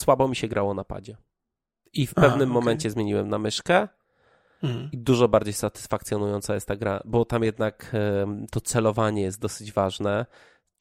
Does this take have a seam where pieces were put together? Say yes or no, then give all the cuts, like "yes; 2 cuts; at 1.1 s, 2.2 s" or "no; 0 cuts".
no; 0 cuts